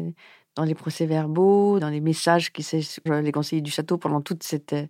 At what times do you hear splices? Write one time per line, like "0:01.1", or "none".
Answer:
0:03.1

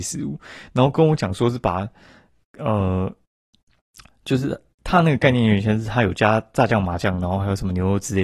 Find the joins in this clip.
none

